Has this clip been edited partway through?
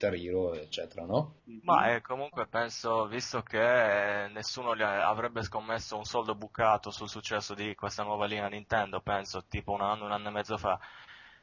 no; 0 cuts

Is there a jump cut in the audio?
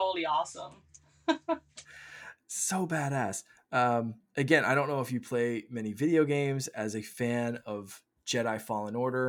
no; 0 cuts

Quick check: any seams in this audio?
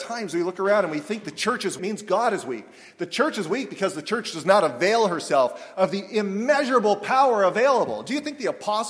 yes; 1 cut; at 1.8 s

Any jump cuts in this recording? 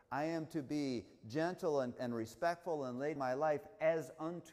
yes; 2 cuts; at 2.0 s, 3.2 s

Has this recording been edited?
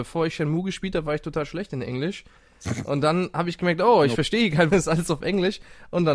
yes; 1 cut; at 4.7 s

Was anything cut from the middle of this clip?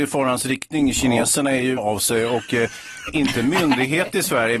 yes; 2 cuts; at 1.8 s, 3.1 s

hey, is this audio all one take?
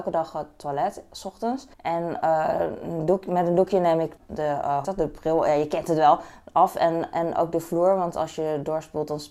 no; 3 cuts; at 1.7 s, 4.2 s, 4.8 s

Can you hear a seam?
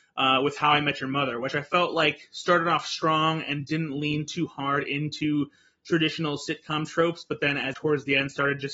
yes; 1 cut; at 7.7 s

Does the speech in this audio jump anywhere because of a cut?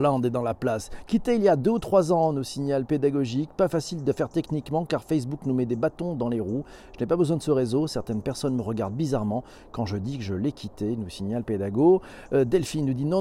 no; 0 cuts

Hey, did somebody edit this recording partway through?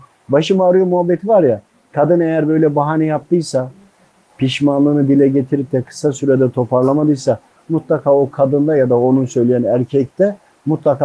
no; 0 cuts

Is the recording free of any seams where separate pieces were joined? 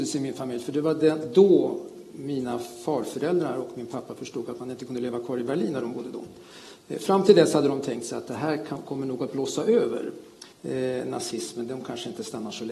no; 1 cut; at 10.5 s

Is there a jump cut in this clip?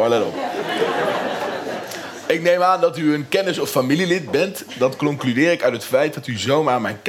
no; 0 cuts

